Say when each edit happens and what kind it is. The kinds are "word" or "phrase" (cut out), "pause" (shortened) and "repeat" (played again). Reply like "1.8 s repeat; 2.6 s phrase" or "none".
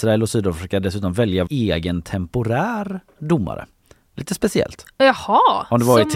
1.5 s word